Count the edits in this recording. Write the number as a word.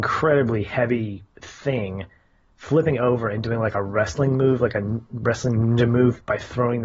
zero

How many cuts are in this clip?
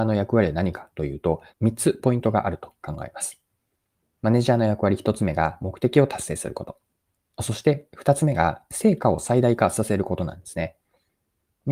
one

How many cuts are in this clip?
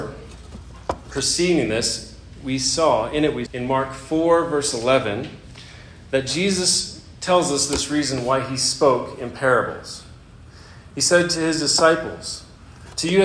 one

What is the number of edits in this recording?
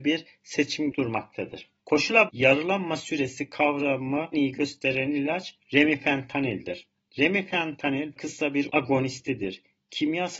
five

